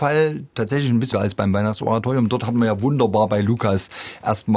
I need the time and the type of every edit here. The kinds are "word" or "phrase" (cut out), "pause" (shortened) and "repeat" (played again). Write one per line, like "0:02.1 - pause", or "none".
0:01.1 - word